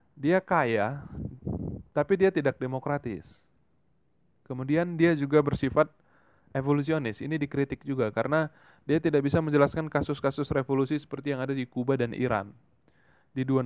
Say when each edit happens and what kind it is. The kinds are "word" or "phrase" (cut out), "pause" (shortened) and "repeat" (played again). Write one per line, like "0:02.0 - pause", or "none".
none